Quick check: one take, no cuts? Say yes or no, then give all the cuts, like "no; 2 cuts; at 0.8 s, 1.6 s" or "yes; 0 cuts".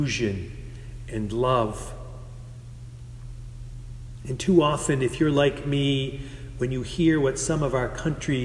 yes; 0 cuts